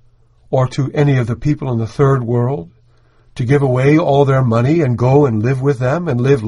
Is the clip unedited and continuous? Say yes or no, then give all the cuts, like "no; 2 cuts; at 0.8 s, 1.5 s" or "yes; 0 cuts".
yes; 0 cuts